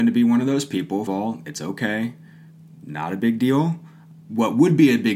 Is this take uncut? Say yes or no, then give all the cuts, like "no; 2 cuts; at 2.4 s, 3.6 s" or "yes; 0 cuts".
no; 1 cut; at 1.1 s